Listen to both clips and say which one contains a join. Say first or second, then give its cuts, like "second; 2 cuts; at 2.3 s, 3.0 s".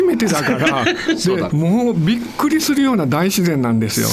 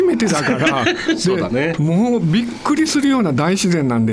first; 1 cut; at 1.5 s